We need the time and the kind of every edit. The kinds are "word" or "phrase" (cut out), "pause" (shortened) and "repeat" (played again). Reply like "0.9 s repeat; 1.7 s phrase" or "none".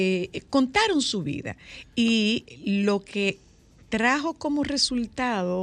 none